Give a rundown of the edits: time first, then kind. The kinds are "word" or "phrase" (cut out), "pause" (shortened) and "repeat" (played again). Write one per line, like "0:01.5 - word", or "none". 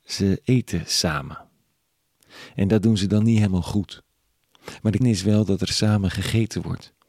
0:05.0 - word